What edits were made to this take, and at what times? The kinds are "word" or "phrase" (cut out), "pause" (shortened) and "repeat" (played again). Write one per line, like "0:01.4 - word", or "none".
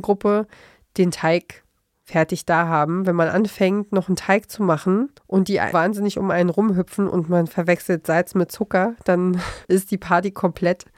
0:05.2 - pause
0:05.7 - word
0:09.6 - pause